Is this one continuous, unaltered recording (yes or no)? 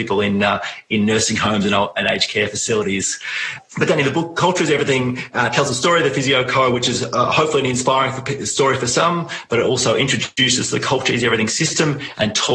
yes